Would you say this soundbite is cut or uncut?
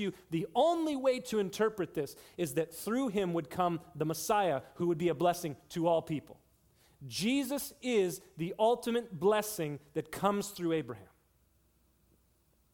uncut